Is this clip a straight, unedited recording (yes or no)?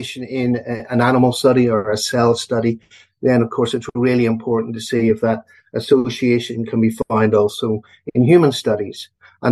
yes